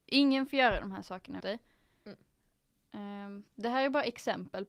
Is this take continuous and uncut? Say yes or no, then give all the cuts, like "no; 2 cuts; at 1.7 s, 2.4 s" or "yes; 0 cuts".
no; 2 cuts; at 1.4 s, 3.5 s